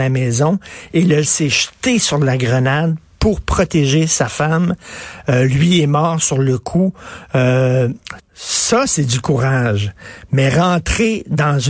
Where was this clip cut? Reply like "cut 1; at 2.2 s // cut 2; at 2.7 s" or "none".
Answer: cut 1; at 1.2 s // cut 2; at 8.2 s